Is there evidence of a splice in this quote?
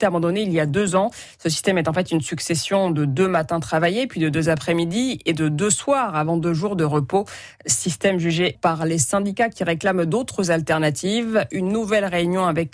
yes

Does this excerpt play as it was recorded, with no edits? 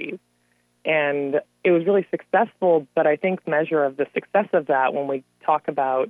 no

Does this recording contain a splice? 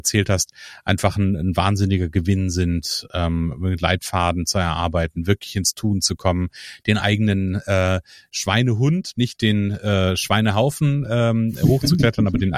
no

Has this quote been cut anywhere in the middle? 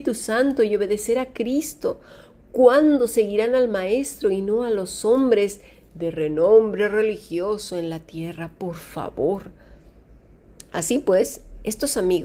no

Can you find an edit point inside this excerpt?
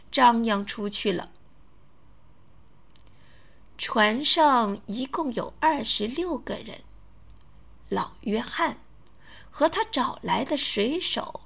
no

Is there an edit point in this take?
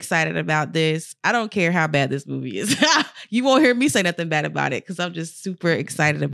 no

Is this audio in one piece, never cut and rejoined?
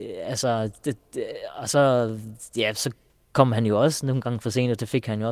yes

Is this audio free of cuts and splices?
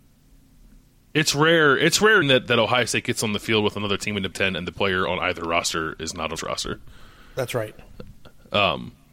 no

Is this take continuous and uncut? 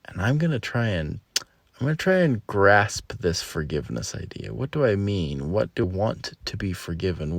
no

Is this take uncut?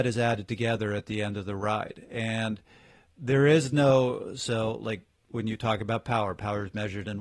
yes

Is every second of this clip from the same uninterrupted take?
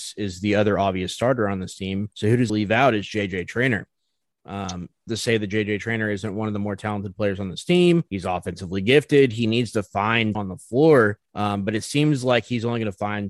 no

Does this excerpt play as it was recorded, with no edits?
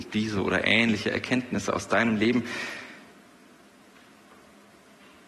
yes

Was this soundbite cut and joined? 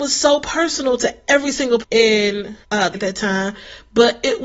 yes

